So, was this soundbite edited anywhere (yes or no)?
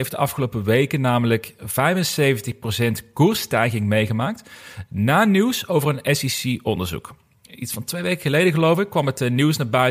no